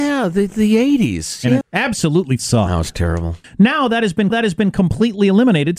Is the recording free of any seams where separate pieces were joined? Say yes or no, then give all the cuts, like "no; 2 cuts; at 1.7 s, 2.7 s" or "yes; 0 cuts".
no; 3 cuts; at 1.6 s, 2.4 s, 4.3 s